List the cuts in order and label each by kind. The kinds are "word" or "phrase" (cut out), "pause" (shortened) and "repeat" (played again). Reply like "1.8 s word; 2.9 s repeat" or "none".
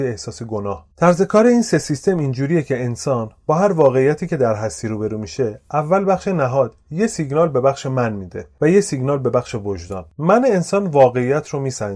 0.9 s pause